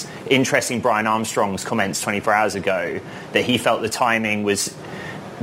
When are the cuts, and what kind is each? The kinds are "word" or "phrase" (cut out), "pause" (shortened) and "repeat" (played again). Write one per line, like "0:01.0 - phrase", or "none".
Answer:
none